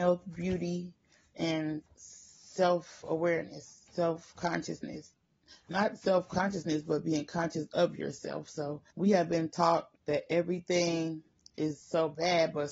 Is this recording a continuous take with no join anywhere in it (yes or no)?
no